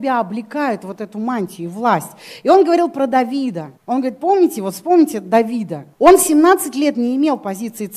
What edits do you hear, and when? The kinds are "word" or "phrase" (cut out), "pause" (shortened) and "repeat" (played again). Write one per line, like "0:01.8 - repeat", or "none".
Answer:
0:03.8 - pause
0:05.9 - pause